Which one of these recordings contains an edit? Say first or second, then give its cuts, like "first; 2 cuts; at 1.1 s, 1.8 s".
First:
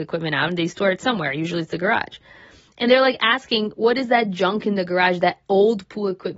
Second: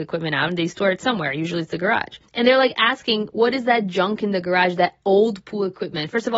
second; 1 cut; at 2.2 s